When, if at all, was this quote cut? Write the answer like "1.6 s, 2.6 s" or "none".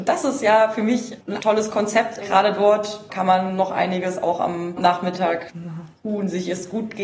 1.4 s, 2.2 s, 4.8 s